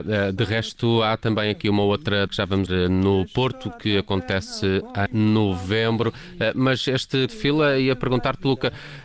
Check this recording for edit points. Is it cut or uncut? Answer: cut